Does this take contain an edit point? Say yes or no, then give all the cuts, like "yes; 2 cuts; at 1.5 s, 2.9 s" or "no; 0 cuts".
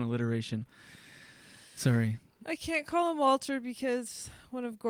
no; 0 cuts